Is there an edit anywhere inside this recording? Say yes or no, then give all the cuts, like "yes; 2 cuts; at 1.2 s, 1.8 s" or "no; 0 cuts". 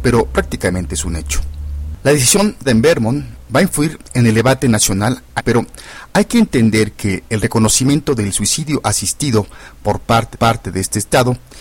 yes; 3 cuts; at 2.6 s, 5.4 s, 10.3 s